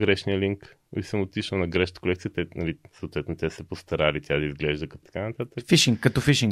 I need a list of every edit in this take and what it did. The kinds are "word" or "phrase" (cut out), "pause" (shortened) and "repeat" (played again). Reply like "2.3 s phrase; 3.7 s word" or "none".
5.0 s phrase